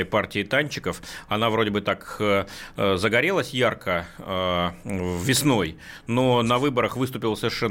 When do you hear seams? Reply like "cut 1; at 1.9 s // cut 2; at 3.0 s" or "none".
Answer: none

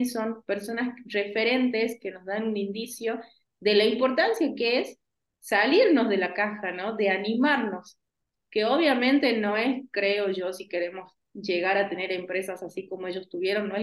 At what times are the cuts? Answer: none

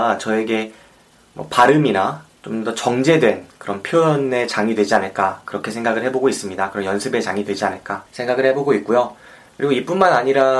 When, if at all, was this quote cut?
cut 1; at 2.4 s // cut 2; at 8.1 s

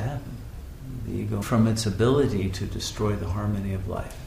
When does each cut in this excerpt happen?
cut 1; at 1.4 s

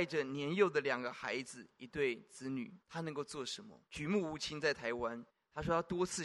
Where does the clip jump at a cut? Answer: cut 1; at 2.8 s // cut 2; at 3.9 s // cut 3; at 5.3 s

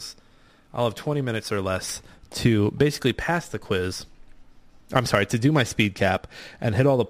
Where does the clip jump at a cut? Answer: none

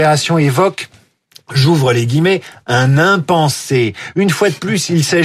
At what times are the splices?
none

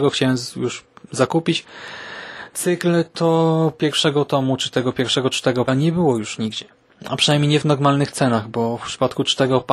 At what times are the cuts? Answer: cut 1; at 5.7 s

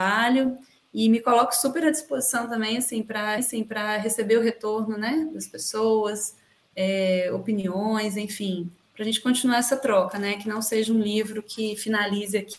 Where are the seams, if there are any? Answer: cut 1; at 3.4 s

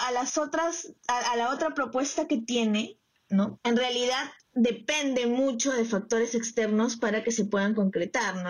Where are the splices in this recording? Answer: cut 1; at 4.4 s

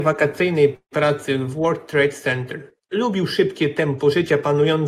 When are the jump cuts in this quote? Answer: none

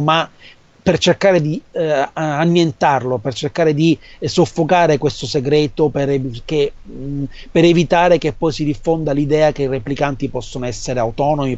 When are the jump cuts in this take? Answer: none

